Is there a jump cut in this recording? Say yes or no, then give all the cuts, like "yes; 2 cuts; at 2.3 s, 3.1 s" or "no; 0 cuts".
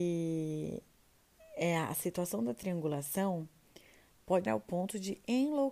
yes; 1 cut; at 4.5 s